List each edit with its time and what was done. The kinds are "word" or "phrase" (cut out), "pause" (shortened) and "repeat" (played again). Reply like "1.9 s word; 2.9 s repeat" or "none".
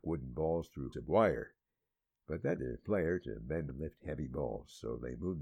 0.9 s word; 2.6 s word; 3.7 s word